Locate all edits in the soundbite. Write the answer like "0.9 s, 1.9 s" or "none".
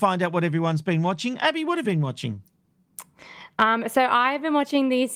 1.8 s